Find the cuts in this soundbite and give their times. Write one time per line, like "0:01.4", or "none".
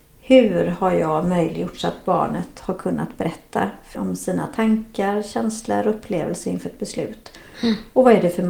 0:03.9

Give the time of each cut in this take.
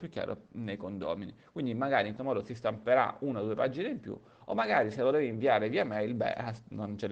0:02.2

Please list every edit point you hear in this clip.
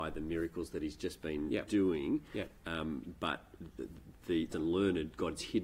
0:04.5

